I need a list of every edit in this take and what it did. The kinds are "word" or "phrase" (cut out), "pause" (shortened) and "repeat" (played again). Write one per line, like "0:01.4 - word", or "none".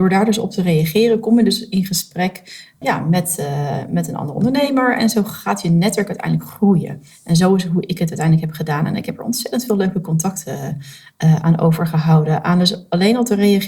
0:02.8 - word